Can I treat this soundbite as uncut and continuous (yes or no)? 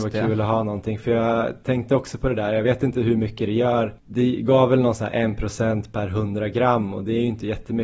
yes